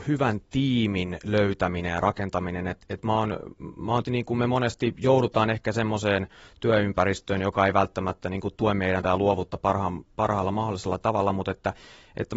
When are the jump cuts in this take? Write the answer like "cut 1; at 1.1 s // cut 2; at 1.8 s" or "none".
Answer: cut 1; at 4.0 s // cut 2; at 8.5 s // cut 3; at 9.0 s